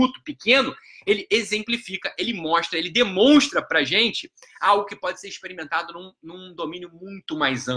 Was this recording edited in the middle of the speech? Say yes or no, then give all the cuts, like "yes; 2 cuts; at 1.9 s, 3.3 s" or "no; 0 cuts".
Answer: no; 0 cuts